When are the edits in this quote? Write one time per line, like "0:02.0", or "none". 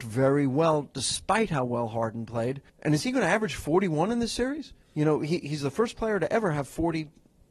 0:02.7
0:04.8